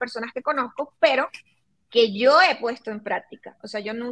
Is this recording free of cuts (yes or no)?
yes